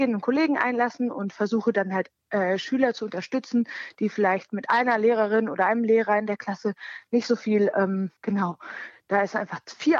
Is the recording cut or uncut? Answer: cut